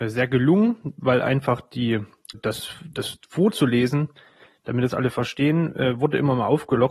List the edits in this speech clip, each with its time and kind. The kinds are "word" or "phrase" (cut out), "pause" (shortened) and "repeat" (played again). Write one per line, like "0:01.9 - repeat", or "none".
0:02.3 - word